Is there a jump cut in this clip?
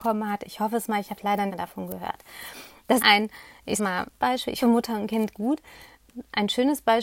yes; 6 cuts; at 1.5 s, 3.0 s, 3.8 s, 4.2 s, 4.6 s, 5.3 s

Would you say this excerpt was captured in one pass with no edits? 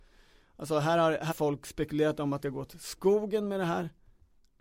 no; 2 cuts; at 1.3 s, 2.4 s

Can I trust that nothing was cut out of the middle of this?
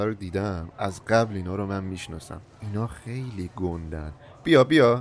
no; 1 cut; at 2.5 s

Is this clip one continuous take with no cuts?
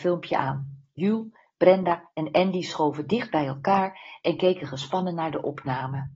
yes; 0 cuts

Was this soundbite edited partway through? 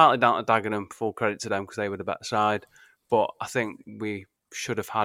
no; 0 cuts

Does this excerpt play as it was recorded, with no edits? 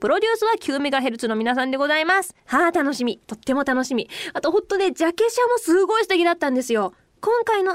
no; 2 cuts; at 2.4 s, 3.2 s

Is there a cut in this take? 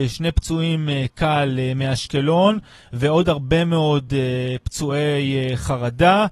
no; 0 cuts

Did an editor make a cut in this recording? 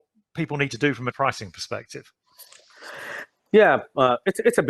yes; 1 cut; at 1.1 s

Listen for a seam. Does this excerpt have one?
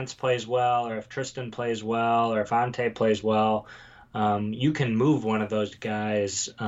no; 0 cuts

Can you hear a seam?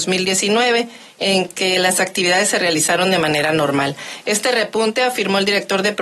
no; 0 cuts

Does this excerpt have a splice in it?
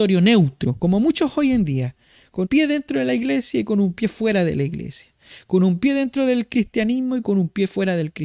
yes; 1 cut; at 2.4 s

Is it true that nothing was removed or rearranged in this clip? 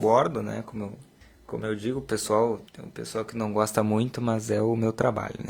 no; 2 cuts; at 1.2 s, 2.7 s

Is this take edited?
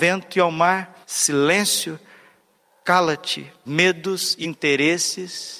yes; 3 cuts; at 1.0 s, 3.7 s, 4.4 s

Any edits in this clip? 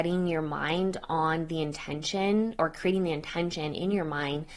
no; 0 cuts

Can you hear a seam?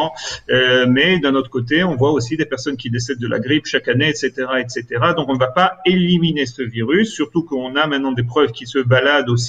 no; 0 cuts

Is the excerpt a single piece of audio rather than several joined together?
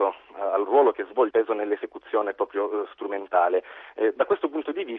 no; 1 cut; at 1.3 s

